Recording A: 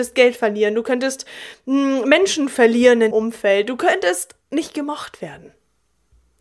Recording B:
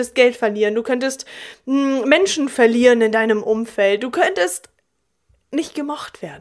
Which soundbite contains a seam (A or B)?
A